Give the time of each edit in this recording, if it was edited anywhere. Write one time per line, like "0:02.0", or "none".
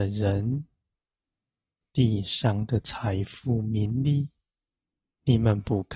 none